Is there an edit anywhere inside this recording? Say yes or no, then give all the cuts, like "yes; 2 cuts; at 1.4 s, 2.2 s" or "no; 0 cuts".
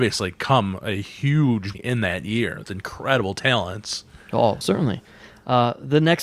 yes; 3 cuts; at 1.7 s, 2.6 s, 4.6 s